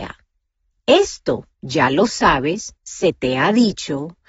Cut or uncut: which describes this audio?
cut